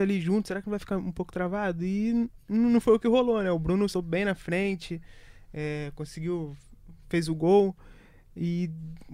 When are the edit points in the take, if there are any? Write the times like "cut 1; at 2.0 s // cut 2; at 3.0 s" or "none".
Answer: cut 1; at 3.9 s